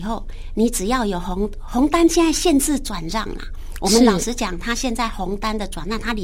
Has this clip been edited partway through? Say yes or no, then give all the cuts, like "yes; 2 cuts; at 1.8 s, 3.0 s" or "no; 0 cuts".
no; 0 cuts